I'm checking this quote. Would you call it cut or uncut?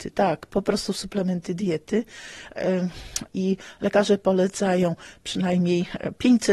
cut